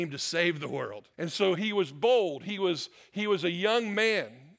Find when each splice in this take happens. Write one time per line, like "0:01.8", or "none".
0:01.1